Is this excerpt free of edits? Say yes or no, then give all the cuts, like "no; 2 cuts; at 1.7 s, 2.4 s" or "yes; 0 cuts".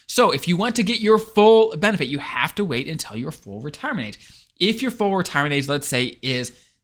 yes; 0 cuts